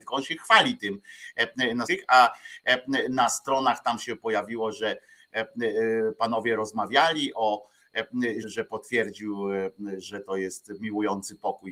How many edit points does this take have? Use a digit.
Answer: 2